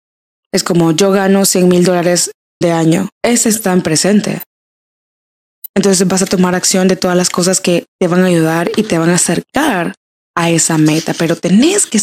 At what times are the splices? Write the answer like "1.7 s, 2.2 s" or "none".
2.6 s, 3.1 s